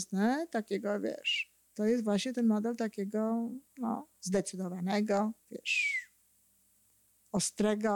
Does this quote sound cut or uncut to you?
cut